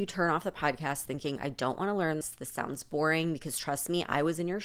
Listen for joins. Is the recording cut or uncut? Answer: cut